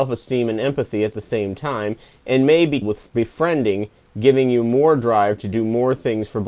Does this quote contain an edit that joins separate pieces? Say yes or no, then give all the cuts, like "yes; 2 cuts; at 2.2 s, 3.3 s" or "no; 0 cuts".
yes; 1 cut; at 2.8 s